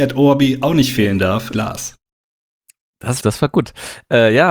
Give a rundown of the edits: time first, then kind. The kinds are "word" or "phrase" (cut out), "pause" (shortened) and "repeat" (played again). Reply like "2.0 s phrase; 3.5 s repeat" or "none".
1.5 s phrase; 3.2 s word